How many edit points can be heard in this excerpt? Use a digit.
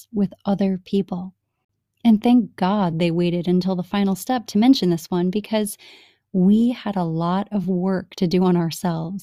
0